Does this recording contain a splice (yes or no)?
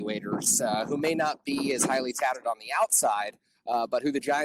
no